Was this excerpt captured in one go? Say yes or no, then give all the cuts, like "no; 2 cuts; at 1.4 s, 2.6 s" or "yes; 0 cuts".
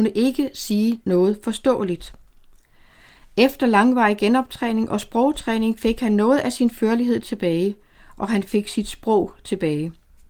yes; 0 cuts